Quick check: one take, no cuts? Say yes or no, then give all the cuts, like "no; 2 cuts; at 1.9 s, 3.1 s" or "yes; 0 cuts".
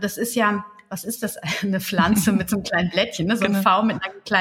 yes; 0 cuts